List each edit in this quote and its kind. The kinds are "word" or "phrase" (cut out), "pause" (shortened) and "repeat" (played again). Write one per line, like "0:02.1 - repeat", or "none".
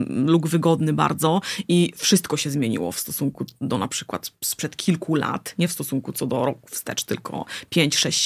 none